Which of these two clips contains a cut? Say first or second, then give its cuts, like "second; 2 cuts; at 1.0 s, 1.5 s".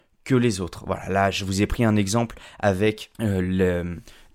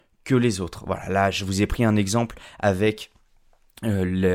first; 1 cut; at 3.1 s